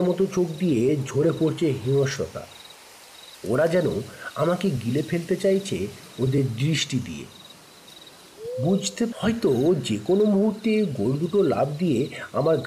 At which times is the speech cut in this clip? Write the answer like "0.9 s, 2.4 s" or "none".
9.1 s

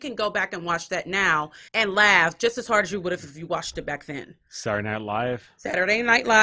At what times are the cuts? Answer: 1.7 s

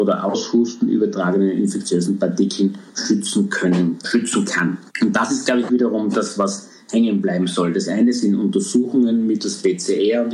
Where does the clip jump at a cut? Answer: 2.9 s, 4.0 s, 4.9 s

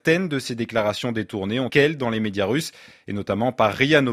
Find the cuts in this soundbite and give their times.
1.7 s

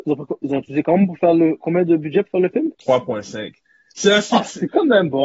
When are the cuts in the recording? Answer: 2.7 s

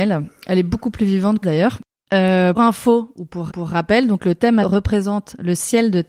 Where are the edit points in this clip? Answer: 1.4 s, 2.6 s, 3.5 s, 4.6 s

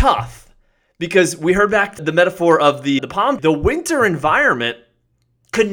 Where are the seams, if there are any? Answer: 2.0 s, 3.0 s, 3.4 s

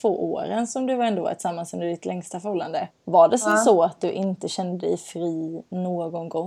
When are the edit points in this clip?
2.9 s

